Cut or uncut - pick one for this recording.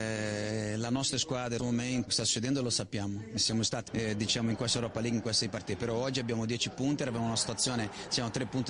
cut